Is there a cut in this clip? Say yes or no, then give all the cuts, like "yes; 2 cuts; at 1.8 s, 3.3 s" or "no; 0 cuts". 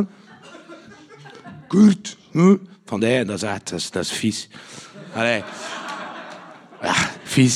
yes; 1 cut; at 3.0 s